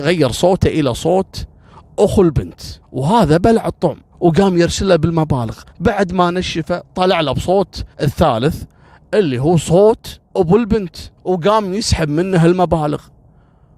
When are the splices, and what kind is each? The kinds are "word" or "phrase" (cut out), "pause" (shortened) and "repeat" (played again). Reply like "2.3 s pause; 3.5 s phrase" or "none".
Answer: 2.8 s pause; 4.1 s pause; 5.7 s pause; 7.9 s pause; 10.3 s pause; 11.2 s pause